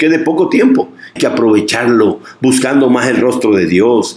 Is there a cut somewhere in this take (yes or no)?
yes